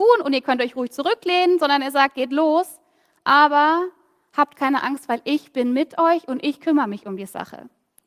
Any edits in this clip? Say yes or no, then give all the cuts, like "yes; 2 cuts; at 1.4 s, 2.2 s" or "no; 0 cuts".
no; 0 cuts